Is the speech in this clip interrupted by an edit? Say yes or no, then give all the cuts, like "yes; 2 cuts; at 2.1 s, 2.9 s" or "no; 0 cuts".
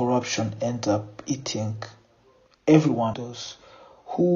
yes; 1 cut; at 3.1 s